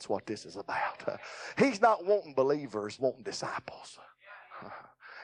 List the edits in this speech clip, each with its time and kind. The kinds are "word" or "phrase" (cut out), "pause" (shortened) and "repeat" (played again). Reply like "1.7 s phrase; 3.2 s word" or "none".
3.0 s word